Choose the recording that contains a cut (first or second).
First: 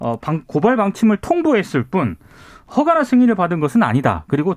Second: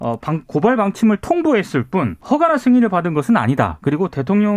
second